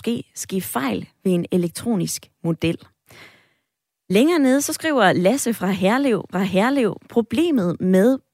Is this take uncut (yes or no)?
no